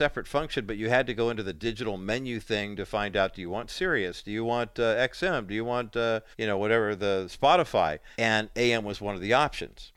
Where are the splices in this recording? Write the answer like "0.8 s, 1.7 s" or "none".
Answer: 6.3 s, 8.1 s